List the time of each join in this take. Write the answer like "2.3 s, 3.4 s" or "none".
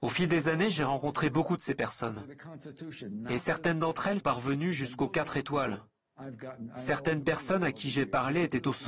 4.2 s